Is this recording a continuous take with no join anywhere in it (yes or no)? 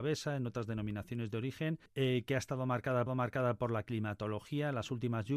no